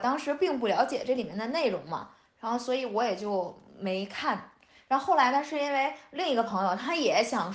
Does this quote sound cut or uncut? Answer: uncut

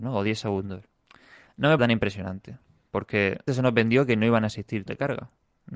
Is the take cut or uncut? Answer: cut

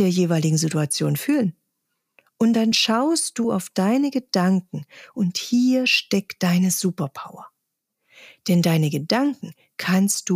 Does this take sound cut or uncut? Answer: uncut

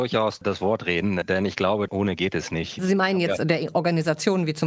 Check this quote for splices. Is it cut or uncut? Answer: uncut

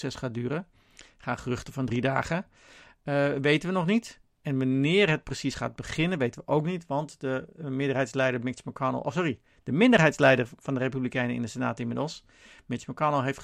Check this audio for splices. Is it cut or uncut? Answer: uncut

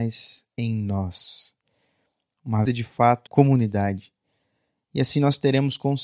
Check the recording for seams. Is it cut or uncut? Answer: cut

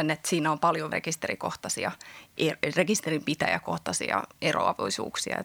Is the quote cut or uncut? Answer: cut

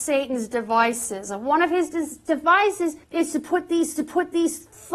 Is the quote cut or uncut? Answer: cut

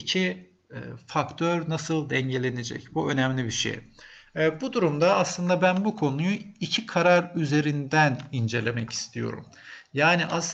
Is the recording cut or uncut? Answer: uncut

